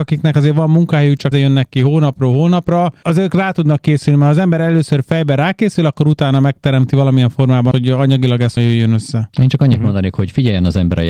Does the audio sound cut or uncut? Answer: cut